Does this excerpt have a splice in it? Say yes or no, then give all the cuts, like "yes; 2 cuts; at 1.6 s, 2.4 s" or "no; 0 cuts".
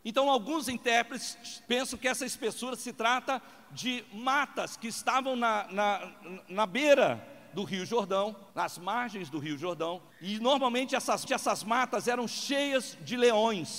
yes; 4 cuts; at 1.6 s, 8.5 s, 10.1 s, 11.3 s